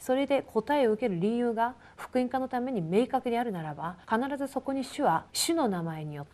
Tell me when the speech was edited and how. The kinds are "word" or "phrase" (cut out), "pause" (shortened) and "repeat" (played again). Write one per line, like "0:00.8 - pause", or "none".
0:04.0 - pause
0:05.3 - pause